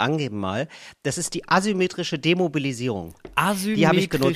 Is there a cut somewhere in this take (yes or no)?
no